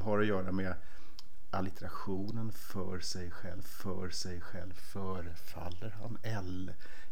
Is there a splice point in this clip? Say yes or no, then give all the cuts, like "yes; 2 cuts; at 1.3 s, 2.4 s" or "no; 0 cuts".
yes; 1 cut; at 3.6 s